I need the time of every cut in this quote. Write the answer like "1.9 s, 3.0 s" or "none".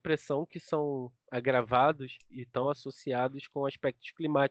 none